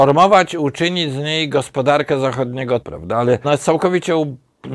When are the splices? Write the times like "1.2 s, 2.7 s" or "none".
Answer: 2.8 s, 3.4 s